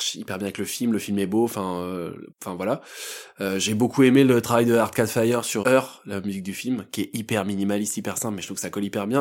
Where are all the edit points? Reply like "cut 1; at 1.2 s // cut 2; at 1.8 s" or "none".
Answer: cut 1; at 2.3 s // cut 2; at 5.6 s